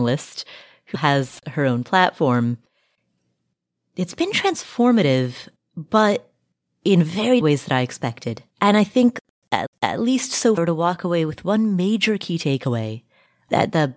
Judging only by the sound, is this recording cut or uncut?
cut